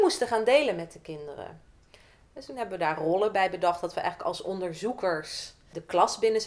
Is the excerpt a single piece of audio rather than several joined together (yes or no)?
yes